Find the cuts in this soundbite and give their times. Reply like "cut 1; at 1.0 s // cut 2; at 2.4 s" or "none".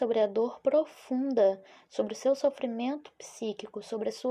none